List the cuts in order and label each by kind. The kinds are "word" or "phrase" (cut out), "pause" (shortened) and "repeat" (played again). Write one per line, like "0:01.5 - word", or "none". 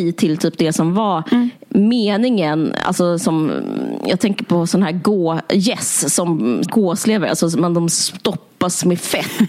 0:06.6 - phrase